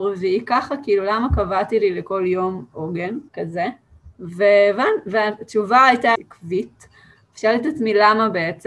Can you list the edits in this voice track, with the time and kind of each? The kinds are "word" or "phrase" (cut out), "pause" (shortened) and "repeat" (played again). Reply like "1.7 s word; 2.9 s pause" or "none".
3.3 s pause; 6.1 s phrase